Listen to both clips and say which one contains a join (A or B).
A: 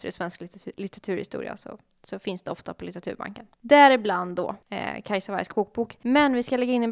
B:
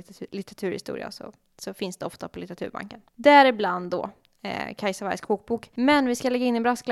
A